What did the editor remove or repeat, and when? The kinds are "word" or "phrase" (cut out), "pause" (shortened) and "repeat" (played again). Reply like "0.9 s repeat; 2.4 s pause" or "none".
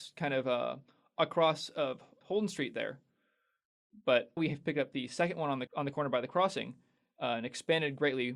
2.2 s word; 4.4 s word; 5.7 s word